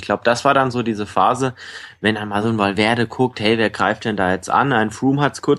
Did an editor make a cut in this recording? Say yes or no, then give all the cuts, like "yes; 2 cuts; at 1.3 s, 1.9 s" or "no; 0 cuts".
no; 0 cuts